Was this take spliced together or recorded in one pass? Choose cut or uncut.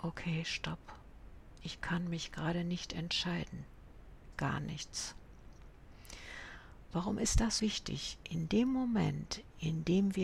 cut